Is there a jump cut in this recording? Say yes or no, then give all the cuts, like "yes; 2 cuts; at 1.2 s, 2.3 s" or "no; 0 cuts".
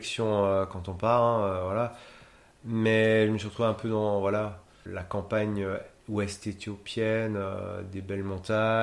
yes; 1 cut; at 4.9 s